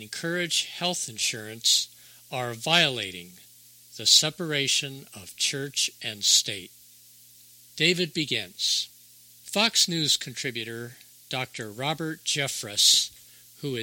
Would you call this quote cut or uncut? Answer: uncut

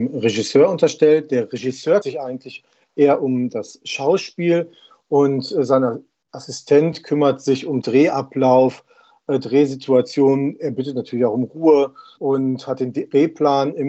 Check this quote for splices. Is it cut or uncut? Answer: cut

